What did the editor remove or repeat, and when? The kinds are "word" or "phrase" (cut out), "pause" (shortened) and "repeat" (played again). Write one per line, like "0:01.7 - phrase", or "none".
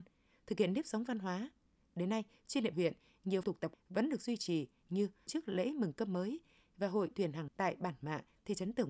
0:02.7 - word
0:03.4 - word
0:03.7 - word
0:05.3 - word
0:07.1 - word
0:07.5 - word